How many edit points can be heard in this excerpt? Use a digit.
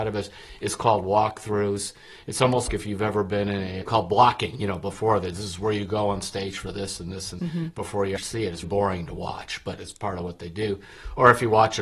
5